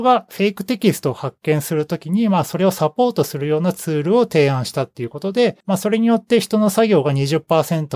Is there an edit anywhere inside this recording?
yes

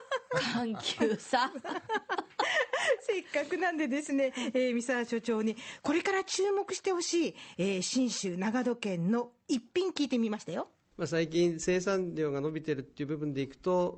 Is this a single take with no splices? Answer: no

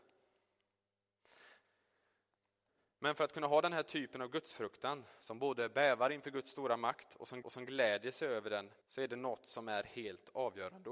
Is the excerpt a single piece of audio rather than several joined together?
no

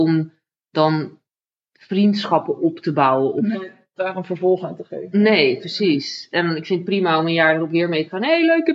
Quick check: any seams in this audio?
no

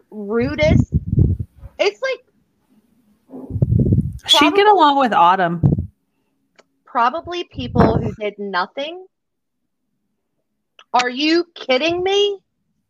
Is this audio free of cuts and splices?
yes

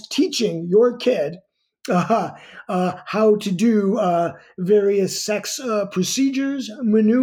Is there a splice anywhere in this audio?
no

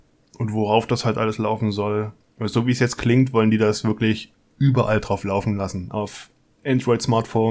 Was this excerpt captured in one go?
yes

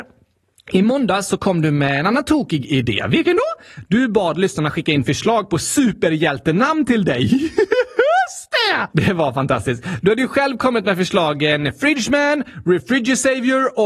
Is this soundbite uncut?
yes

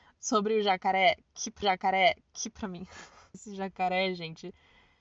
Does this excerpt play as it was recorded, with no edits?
no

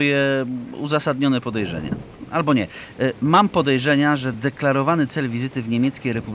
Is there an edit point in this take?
no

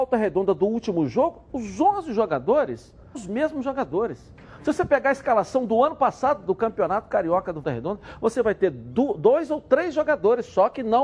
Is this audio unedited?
no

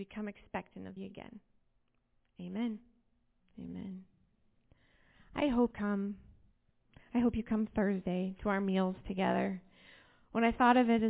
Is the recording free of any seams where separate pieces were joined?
no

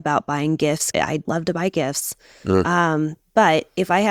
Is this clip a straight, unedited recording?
no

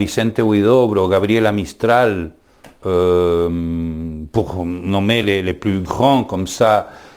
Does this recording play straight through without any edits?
yes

